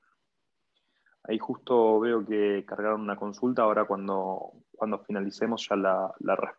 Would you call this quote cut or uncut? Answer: uncut